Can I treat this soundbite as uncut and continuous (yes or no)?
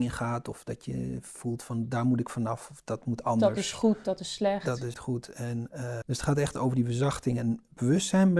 no